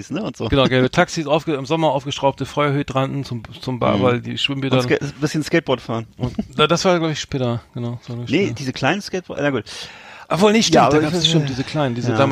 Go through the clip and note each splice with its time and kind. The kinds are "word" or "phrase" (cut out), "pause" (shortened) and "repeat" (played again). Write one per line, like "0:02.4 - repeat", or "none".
none